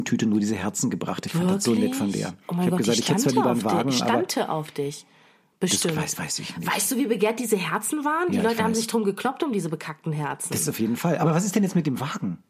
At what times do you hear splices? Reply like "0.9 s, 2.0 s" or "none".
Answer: none